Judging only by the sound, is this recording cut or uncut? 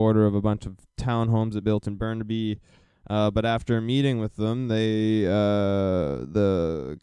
uncut